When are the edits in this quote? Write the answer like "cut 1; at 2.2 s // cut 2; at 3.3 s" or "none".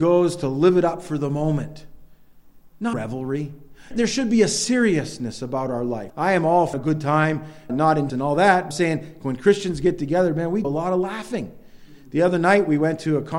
cut 1; at 2.9 s // cut 2; at 3.9 s // cut 3; at 6.1 s // cut 4; at 6.7 s // cut 5; at 7.7 s // cut 6; at 8.1 s // cut 7; at 8.7 s // cut 8; at 10.6 s